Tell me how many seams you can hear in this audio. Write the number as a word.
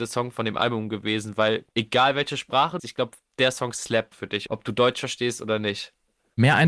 five